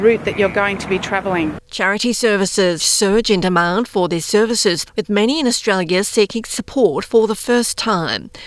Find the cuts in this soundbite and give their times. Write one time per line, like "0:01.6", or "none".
0:01.6
0:02.8
0:04.9